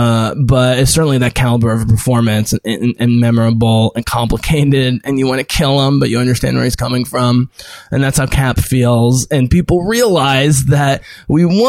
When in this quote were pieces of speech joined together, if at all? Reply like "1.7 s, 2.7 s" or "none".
none

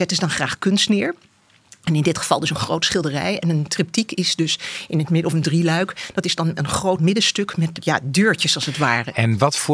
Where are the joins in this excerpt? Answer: 7.0 s

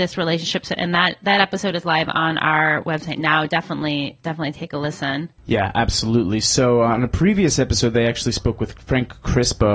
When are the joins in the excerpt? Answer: 5.4 s

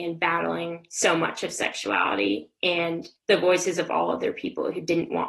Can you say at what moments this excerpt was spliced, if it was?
3.2 s

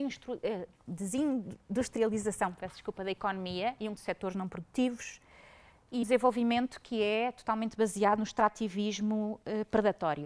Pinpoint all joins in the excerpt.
4.0 s, 6.0 s

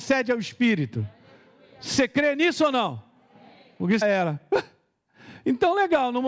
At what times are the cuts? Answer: 4.0 s

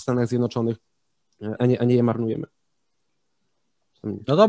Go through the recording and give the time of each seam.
1.6 s

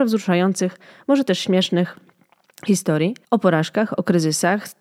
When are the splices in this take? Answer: 3.2 s

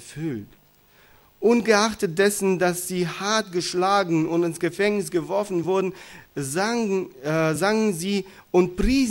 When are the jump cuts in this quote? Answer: none

